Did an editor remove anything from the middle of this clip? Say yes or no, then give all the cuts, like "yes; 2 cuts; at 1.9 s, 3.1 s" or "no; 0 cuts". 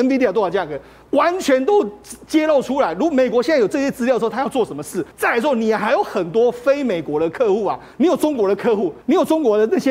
yes; 3 cuts; at 5.1 s, 7.9 s, 9.0 s